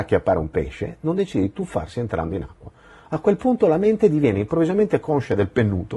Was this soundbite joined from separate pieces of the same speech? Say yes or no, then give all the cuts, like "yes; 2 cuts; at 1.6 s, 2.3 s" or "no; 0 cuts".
no; 0 cuts